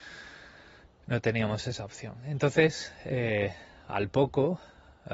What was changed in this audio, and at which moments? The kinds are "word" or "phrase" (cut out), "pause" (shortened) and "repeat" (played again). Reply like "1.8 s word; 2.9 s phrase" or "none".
none